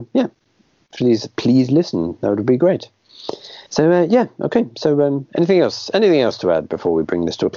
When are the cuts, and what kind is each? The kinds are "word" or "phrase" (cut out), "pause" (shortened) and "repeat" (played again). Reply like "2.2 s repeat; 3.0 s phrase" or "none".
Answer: 3.7 s pause